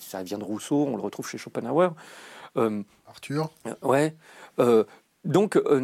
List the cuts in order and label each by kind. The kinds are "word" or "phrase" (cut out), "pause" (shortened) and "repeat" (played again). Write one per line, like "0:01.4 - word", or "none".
none